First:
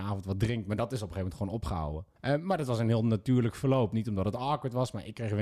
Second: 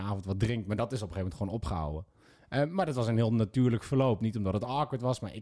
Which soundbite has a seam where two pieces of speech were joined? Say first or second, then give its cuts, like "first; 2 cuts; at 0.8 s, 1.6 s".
first; 1 cut; at 2.2 s